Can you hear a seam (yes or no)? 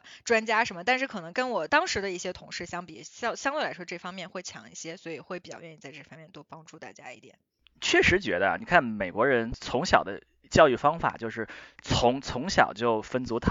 no